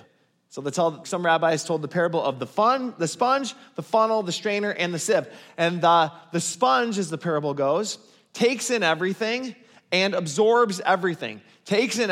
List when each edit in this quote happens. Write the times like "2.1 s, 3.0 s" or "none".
1.0 s